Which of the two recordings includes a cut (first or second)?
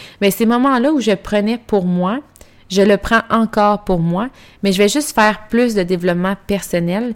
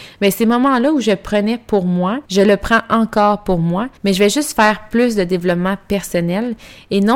second